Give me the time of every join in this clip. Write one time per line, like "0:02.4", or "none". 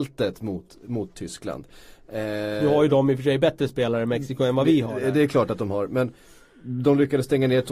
none

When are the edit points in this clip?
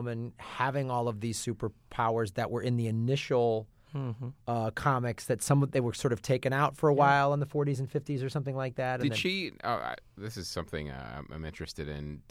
none

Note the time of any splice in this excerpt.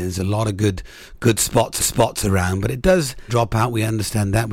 0:01.8
0:03.3

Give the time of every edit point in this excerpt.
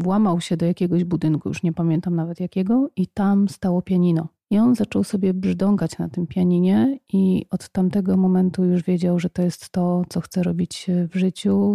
none

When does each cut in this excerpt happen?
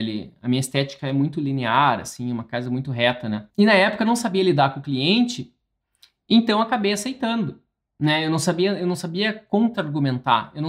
none

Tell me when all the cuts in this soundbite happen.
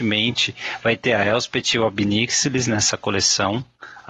none

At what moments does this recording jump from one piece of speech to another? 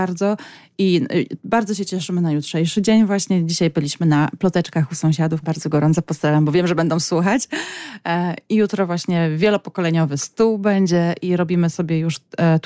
0:05.4

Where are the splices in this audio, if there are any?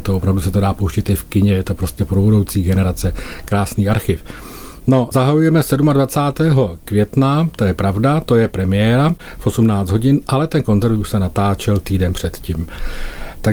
none

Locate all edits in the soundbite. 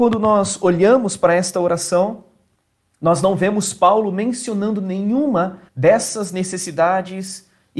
0:05.7

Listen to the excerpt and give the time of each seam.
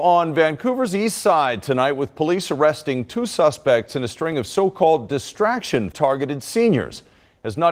0:05.9

